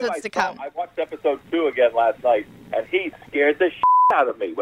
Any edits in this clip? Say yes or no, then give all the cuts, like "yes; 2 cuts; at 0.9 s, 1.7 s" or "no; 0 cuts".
no; 0 cuts